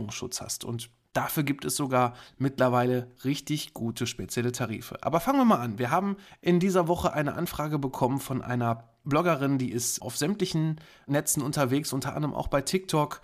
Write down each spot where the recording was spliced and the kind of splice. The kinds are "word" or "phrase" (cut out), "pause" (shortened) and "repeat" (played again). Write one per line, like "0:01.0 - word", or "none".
none